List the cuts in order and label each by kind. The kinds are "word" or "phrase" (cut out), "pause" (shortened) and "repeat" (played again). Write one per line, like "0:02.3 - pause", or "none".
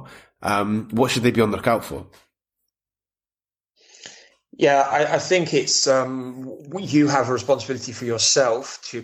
none